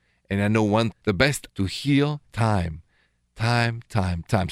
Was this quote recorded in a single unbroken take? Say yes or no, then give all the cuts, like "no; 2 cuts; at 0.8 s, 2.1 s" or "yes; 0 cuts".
no; 3 cuts; at 0.9 s, 1.5 s, 2.3 s